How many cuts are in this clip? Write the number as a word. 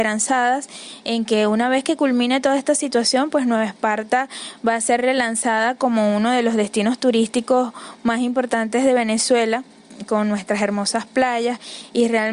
zero